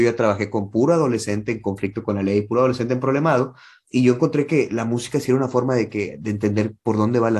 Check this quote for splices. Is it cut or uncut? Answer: uncut